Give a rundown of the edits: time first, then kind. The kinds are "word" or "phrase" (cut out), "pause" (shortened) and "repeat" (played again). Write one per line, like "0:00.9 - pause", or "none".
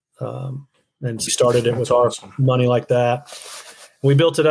0:01.3 - word